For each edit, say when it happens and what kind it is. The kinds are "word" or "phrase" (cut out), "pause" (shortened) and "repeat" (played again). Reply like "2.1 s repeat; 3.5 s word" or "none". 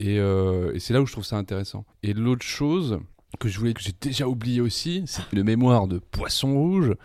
1.9 s pause; 3.1 s pause; 3.7 s phrase; 5.3 s phrase